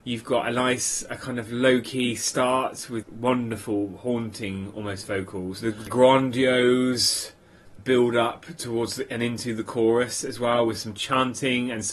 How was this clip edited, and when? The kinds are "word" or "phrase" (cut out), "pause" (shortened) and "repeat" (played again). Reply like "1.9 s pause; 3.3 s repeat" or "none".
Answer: 3.0 s word; 5.9 s word; 7.8 s word

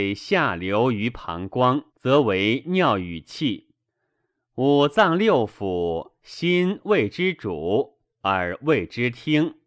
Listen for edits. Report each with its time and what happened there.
1.9 s pause

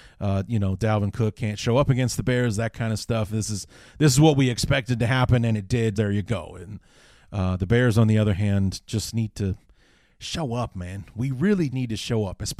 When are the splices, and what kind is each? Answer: 5.9 s word; 11.7 s word

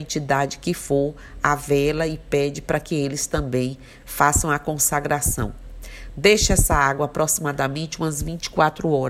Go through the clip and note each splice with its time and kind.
none

